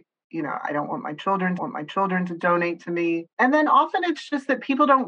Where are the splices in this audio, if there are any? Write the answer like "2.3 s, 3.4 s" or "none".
1.6 s, 3.3 s